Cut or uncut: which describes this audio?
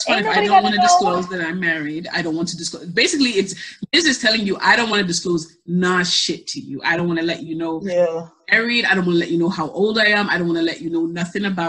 uncut